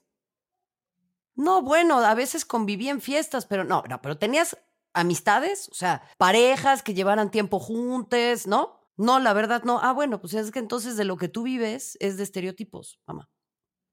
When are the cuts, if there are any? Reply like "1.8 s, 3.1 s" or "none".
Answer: 6.1 s, 8.9 s